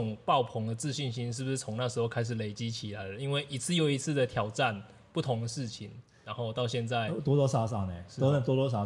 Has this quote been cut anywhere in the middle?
no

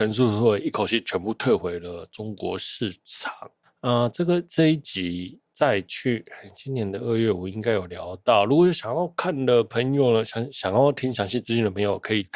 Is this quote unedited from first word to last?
no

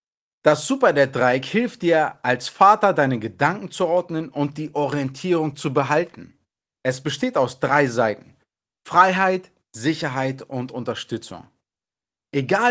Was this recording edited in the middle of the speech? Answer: no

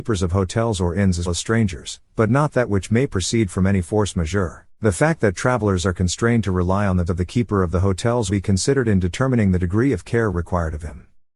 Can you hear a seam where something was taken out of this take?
yes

